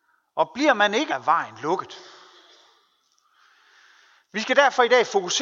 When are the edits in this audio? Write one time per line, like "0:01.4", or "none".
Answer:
0:01.1